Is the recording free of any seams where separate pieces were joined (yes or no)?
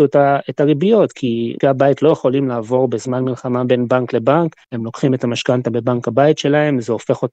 no